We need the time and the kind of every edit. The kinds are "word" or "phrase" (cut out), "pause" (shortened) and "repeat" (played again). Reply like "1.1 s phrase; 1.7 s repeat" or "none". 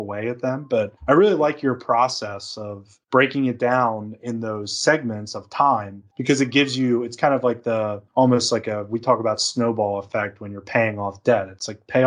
1.0 s pause; 3.0 s pause; 6.1 s pause; 8.1 s pause